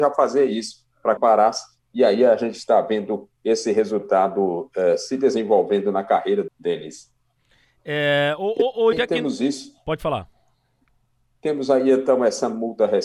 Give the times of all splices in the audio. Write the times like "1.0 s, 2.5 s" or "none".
1.2 s, 6.5 s, 8.9 s